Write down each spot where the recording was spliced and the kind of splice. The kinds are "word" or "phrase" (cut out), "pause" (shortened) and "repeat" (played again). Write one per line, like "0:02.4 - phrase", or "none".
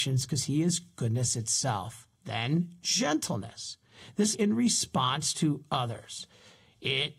0:02.1 - pause
0:04.3 - phrase

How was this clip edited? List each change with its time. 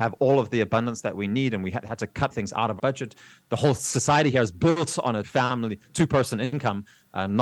0:02.3 - word
0:02.8 - word
0:05.2 - word

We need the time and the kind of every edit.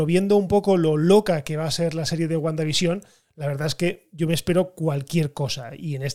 none

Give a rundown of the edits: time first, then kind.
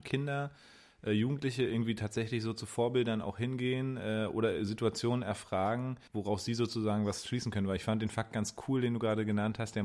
0:06.1 - pause

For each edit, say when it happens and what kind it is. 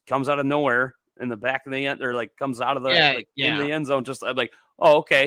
none

